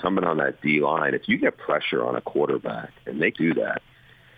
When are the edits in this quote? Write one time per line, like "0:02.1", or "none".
0:03.3